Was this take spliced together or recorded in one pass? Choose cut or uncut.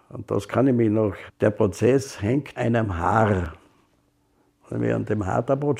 cut